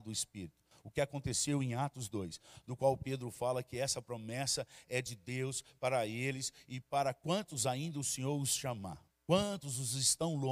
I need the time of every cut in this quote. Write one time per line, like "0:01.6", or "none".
0:09.1